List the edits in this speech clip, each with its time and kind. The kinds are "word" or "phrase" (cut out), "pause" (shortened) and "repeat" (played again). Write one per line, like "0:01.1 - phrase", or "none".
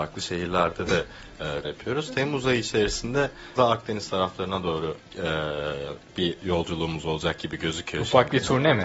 0:01.6 - word
0:03.6 - word
0:05.0 - pause
0:06.1 - pause